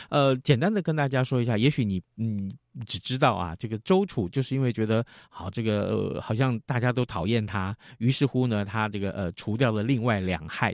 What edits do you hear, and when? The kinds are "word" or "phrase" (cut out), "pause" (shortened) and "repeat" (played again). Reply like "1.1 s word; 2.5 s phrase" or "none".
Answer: none